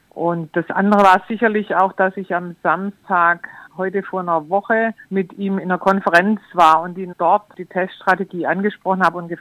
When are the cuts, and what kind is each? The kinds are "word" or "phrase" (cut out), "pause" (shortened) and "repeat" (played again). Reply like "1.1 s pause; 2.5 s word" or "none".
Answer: 3.7 s pause; 5.0 s pause; 7.1 s word; 7.5 s word